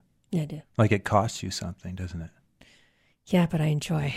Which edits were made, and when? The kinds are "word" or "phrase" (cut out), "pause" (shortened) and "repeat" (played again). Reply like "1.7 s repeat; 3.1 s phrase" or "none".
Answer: none